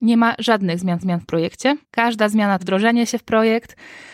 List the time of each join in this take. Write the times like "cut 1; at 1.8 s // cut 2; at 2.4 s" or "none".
cut 1; at 1.0 s // cut 2; at 1.8 s // cut 3; at 2.6 s